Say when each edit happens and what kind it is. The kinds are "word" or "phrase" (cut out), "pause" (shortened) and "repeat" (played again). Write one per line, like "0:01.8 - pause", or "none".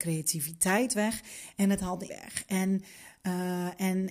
0:02.1 - word